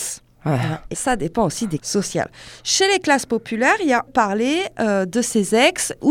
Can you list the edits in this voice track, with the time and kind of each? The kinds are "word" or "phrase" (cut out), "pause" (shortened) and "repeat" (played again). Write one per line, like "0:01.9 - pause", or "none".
0:00.9 - word
0:01.8 - word
0:04.1 - phrase